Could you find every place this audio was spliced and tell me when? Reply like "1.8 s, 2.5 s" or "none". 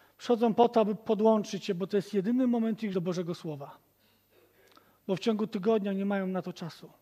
2.9 s